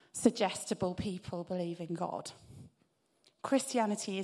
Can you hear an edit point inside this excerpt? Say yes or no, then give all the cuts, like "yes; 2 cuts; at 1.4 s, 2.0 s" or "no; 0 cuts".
no; 0 cuts